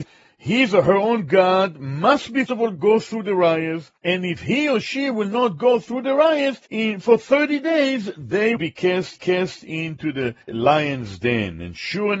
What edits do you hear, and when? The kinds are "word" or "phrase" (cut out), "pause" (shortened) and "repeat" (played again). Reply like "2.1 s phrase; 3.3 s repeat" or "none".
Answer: 2.5 s word; 4.0 s pause; 6.7 s pause; 8.6 s word; 9.2 s repeat; 10.4 s pause